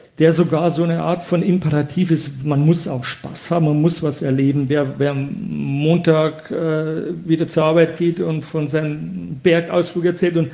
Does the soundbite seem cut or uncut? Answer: uncut